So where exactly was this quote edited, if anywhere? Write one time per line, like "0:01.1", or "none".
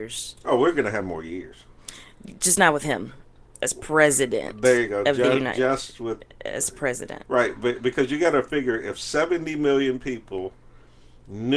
none